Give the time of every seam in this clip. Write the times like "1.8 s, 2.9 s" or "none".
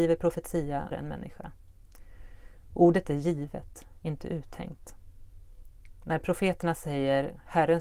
0.9 s